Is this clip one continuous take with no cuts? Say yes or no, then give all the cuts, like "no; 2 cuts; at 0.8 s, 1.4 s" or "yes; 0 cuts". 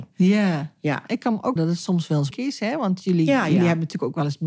no; 2 cuts; at 1.6 s, 2.3 s